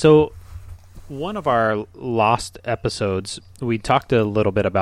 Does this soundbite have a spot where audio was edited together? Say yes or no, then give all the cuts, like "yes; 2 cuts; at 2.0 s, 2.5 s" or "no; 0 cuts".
no; 0 cuts